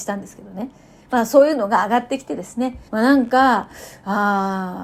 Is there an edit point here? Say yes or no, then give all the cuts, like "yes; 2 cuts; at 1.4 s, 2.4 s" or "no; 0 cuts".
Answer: yes; 1 cut; at 2.9 s